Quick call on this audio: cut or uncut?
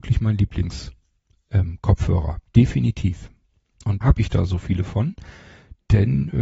cut